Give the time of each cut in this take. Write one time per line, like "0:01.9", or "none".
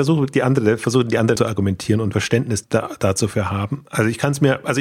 0:01.4
0:02.1
0:02.6